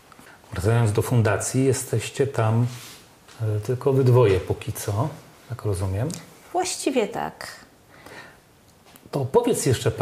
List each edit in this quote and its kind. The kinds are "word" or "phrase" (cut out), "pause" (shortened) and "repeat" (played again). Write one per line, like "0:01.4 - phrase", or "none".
none